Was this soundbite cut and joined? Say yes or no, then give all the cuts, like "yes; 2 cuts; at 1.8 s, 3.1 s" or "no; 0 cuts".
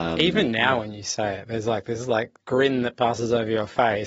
no; 0 cuts